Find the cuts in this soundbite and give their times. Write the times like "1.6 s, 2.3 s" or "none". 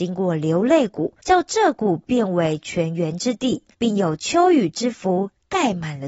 1.2 s, 3.7 s